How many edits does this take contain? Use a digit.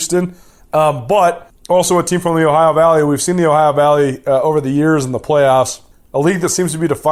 0